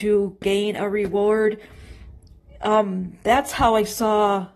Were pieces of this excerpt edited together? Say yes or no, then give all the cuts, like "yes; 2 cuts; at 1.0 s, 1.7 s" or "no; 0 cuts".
no; 0 cuts